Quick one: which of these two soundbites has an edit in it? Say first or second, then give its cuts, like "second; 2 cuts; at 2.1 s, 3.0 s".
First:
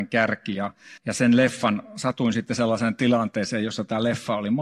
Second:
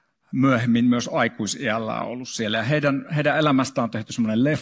first; 1 cut; at 1.0 s